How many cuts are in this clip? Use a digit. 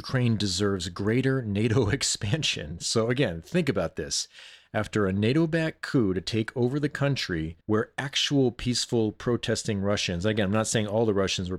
1